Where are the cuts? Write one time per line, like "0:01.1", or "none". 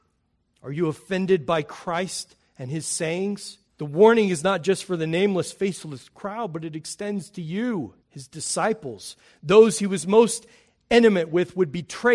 0:03.7
0:08.0